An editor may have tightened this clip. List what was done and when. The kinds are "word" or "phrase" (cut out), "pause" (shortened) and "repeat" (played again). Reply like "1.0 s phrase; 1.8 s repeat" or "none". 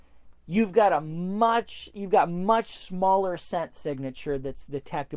none